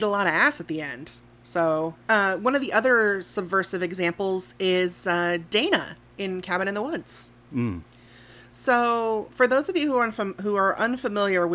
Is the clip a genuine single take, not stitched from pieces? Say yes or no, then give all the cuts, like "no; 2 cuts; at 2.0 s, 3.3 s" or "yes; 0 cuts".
yes; 0 cuts